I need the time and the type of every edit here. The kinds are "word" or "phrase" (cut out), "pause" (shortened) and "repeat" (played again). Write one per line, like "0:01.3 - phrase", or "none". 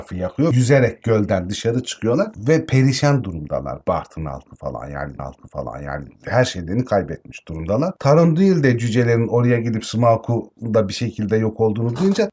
0:05.2 - repeat